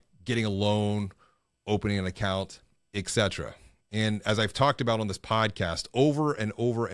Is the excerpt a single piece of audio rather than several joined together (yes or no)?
yes